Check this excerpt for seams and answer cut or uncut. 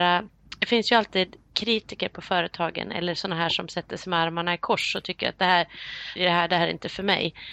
cut